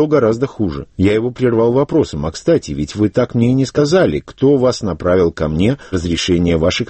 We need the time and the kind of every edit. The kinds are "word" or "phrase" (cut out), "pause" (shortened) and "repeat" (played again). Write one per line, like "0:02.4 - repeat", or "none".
0:00.9 - pause
0:05.9 - word

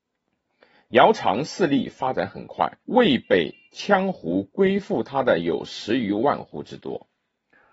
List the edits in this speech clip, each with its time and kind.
0:02.8 - pause

